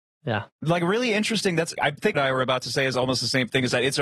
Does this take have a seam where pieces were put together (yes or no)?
yes